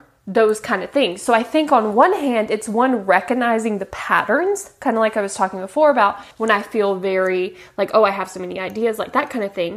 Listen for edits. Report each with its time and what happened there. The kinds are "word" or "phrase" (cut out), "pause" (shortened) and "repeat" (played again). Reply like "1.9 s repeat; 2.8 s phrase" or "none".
6.3 s pause